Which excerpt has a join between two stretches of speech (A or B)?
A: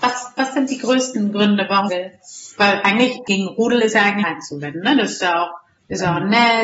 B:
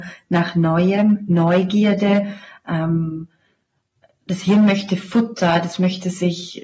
A